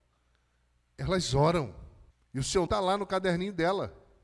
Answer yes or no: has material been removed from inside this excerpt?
yes